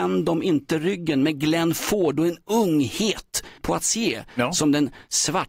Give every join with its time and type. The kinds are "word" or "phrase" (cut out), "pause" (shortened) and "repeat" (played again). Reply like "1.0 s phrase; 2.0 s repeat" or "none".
3.6 s word